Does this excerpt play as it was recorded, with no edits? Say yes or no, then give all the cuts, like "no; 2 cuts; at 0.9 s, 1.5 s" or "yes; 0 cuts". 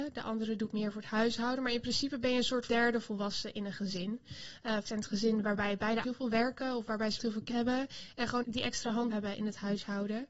no; 7 cuts; at 2.7 s, 4.8 s, 6.0 s, 7.2 s, 7.5 s, 8.4 s, 9.1 s